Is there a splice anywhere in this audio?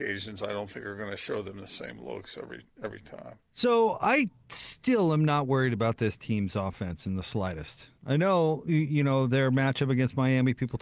yes; 2 cuts; at 3.4 s, 8.0 s

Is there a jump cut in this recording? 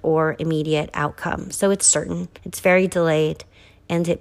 yes; 2 cuts; at 1.8 s, 2.4 s

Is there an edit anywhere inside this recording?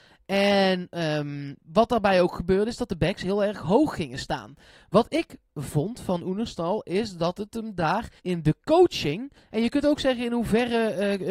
yes; 1 cut; at 8.2 s

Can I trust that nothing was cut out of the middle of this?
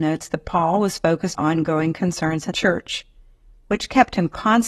no; 2 cuts; at 1.3 s, 2.5 s

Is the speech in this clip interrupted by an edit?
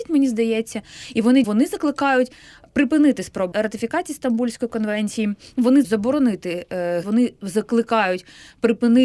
yes; 4 cuts; at 1.4 s, 3.5 s, 5.8 s, 7.0 s

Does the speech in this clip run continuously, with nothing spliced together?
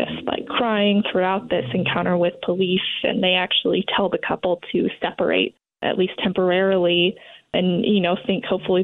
yes; 0 cuts

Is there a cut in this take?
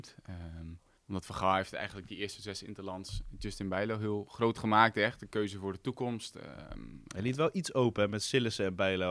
yes; 1 cut; at 1.0 s

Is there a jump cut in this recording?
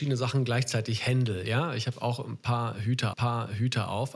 yes; 1 cut; at 3.1 s

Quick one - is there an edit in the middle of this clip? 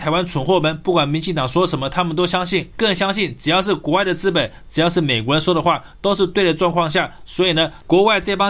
yes; 1 cut; at 2.7 s

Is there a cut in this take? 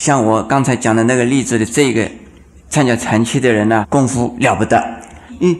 yes; 1 cut; at 3.8 s

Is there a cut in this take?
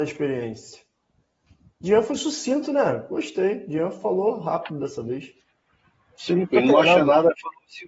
no; 0 cuts

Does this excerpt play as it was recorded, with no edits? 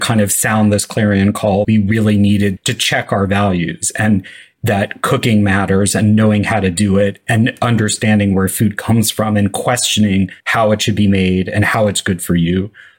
no; 3 cuts; at 1.6 s, 2.6 s, 10.4 s

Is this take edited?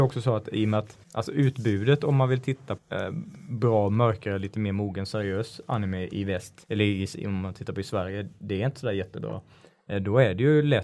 yes; 3 cuts; at 1.0 s, 2.8 s, 6.6 s

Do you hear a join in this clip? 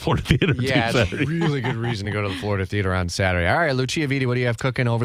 no; 0 cuts

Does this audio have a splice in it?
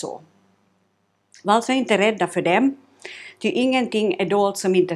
no; 0 cuts

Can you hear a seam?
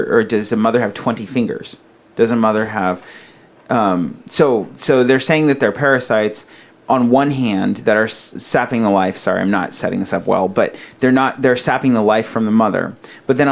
no; 0 cuts

